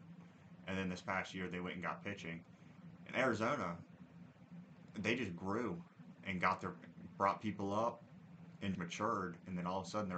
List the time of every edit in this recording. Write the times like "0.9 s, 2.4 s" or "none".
8.7 s